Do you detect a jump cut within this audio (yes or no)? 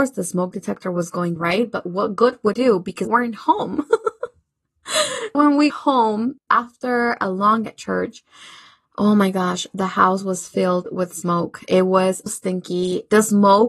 yes